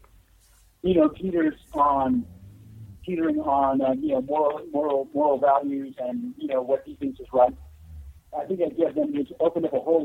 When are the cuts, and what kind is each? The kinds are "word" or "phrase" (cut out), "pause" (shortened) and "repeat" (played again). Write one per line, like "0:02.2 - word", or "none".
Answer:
0:02.9 - pause